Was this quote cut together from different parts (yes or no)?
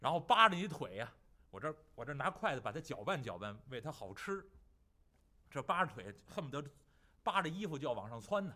no